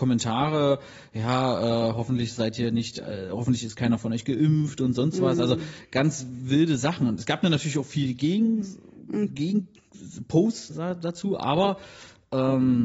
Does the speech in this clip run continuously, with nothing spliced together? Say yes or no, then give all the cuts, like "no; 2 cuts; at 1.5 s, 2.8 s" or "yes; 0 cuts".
no; 1 cut; at 10.7 s